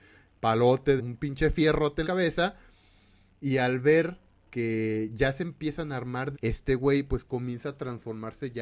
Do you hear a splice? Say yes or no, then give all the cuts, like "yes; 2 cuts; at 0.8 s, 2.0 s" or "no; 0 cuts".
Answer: yes; 3 cuts; at 1.0 s, 2.0 s, 6.3 s